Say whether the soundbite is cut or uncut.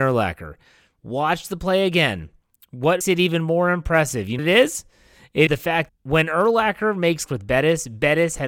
cut